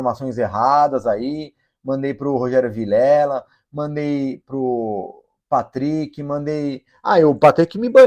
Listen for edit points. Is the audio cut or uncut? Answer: uncut